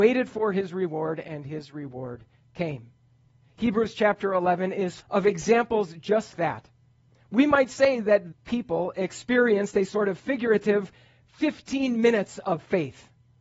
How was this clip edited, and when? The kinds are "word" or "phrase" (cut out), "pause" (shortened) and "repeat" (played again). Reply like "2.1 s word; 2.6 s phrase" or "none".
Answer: 5.0 s word; 6.3 s word; 8.3 s word

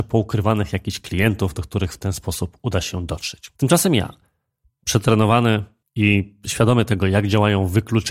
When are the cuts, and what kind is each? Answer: 3.6 s pause; 5.8 s pause

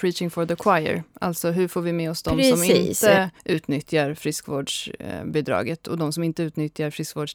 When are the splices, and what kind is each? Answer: 3.4 s pause

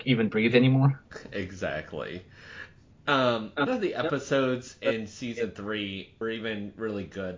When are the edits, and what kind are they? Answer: 3.7 s word; 6.2 s word

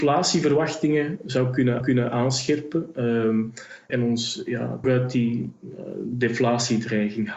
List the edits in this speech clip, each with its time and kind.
1.8 s repeat; 3.9 s phrase; 4.8 s word

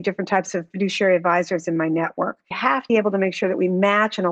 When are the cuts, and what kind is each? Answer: 2.5 s word; 2.9 s word

